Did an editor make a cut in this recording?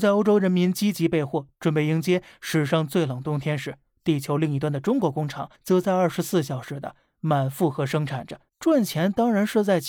yes; 2 cuts; at 5.5 s, 8.5 s

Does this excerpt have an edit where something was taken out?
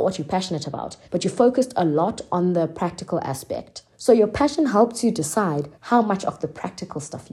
yes; 3 cuts; at 1.0 s, 3.9 s, 5.7 s

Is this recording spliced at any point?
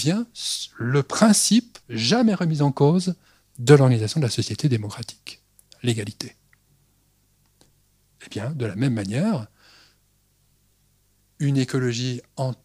yes; 1 cut; at 1.8 s

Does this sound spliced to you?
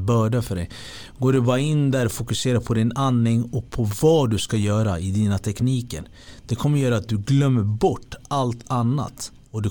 no; 0 cuts

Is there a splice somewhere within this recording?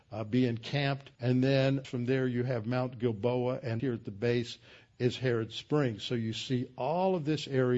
yes; 3 cuts; at 1.1 s, 1.8 s, 3.8 s

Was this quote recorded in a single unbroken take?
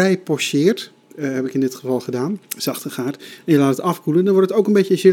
no; 1 cut; at 2.5 s

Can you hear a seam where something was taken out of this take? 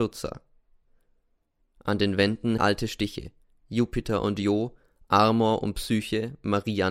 yes; 1 cut; at 2.6 s

